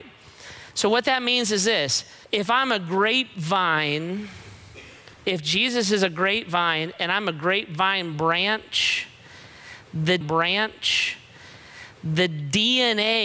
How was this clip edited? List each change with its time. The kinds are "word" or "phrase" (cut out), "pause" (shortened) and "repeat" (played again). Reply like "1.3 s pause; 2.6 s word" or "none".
2.2 s pause; 10.2 s repeat